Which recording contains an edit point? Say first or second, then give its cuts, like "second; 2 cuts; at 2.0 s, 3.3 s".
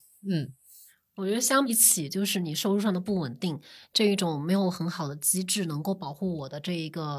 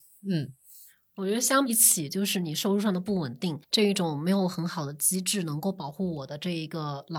second; 1 cut; at 3.6 s